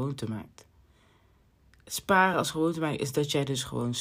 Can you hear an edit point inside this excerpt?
no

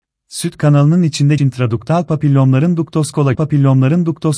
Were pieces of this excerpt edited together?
yes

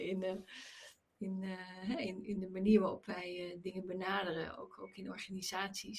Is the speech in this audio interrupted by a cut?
no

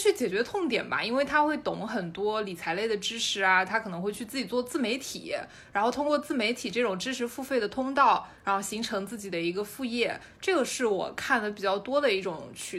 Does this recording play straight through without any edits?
yes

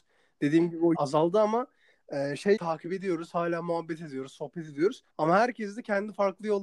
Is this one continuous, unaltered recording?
no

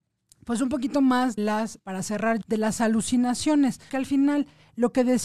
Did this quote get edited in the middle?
yes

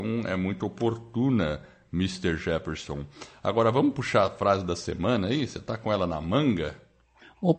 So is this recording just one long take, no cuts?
yes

